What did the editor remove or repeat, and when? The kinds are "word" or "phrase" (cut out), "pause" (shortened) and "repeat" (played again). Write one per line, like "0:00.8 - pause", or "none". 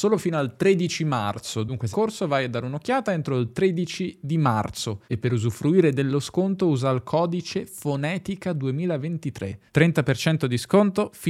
0:01.9 - phrase
0:05.0 - pause
0:09.7 - pause